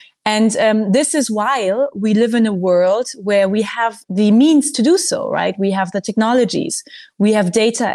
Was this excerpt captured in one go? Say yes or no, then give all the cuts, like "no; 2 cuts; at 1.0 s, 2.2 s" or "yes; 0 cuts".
no; 1 cut; at 4.0 s